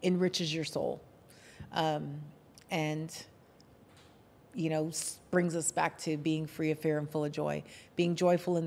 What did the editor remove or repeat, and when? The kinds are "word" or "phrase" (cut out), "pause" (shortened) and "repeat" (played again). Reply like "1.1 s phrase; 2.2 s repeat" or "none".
none

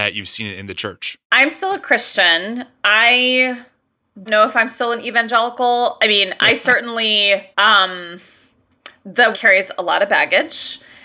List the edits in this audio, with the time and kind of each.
1.2 s pause; 4.3 s word; 7.5 s pause; 9.3 s word

